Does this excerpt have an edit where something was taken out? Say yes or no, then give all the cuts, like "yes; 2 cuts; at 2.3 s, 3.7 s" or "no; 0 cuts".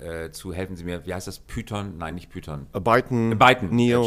no; 0 cuts